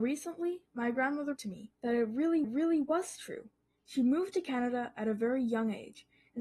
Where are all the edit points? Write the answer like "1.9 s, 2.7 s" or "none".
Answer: 1.4 s, 1.7 s, 2.4 s, 3.7 s